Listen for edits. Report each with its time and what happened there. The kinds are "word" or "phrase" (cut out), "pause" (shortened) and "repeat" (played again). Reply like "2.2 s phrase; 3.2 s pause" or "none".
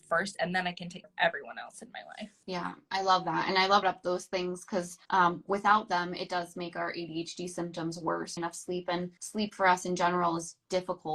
1.0 s word; 2.4 s pause; 3.8 s phrase; 5.0 s pause; 8.4 s phrase; 9.2 s pause